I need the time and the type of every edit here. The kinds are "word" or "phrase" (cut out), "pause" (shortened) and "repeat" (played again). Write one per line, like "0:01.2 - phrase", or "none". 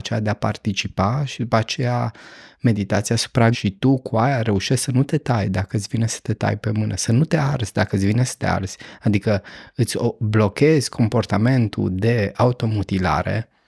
0:03.5 - word

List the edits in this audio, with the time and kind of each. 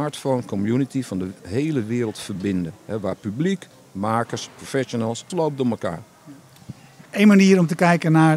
0:05.3 - word
0:07.1 - pause

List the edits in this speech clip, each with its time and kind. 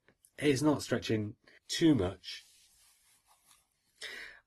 0:01.6 - word

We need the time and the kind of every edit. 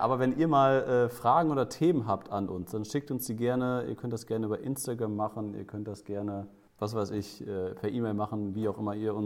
0:06.7 - pause

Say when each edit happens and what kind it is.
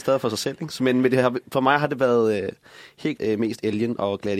0:03.2 - word

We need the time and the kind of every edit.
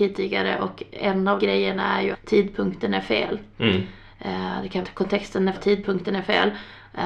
0:01.4 - word
0:02.1 - word
0:04.8 - word
0:05.5 - word

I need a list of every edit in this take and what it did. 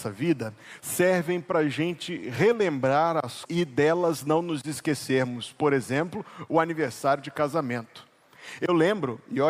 0:03.5 - word

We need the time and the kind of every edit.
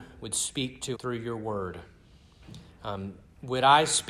0:00.9 - word

